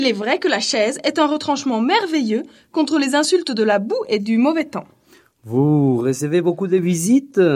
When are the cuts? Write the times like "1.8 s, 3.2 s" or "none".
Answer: none